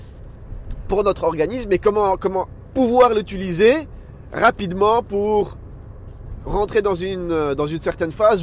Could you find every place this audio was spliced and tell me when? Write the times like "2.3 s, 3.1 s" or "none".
none